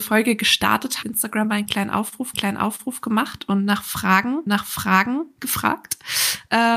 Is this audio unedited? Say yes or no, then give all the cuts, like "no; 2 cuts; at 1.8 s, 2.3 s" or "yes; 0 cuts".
no; 3 cuts; at 1.0 s, 2.3 s, 4.5 s